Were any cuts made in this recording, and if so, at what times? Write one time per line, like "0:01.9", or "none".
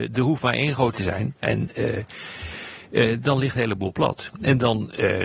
0:00.9